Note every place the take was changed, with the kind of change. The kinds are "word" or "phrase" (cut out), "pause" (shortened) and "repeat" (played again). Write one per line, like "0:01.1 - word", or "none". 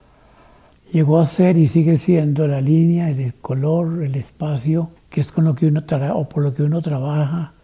0:05.0 - pause